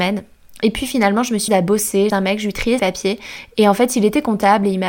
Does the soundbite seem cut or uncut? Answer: cut